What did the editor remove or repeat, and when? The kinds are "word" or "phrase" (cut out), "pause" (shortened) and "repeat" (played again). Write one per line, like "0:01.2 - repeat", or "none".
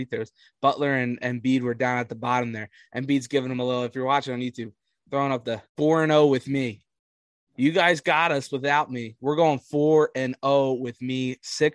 0:05.7 - pause